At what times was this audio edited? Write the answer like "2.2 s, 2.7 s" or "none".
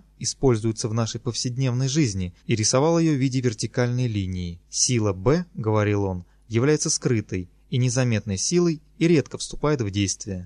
2.4 s, 4.6 s